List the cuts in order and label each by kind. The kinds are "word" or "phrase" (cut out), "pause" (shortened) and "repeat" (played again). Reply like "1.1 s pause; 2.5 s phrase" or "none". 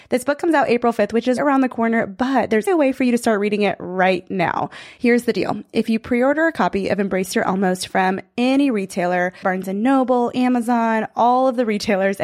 1.4 s word; 2.7 s word; 9.4 s word